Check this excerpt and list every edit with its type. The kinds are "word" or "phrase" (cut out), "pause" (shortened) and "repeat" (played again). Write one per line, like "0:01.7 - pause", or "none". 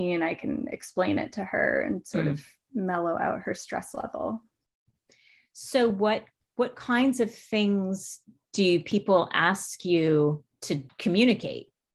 none